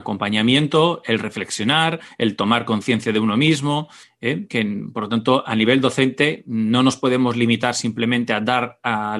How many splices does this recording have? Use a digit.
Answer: 0